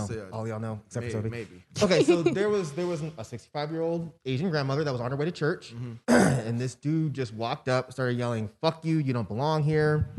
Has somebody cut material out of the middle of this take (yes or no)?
yes